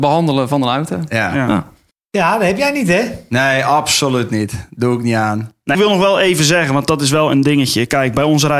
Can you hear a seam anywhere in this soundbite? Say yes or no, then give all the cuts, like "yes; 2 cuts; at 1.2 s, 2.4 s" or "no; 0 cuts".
yes; 2 cuts; at 1.9 s, 5.7 s